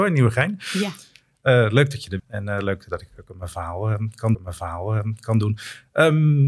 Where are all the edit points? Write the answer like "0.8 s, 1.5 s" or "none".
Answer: 2.2 s, 4.3 s